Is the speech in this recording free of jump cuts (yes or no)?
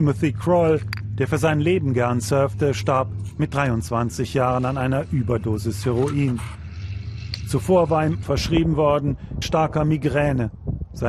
no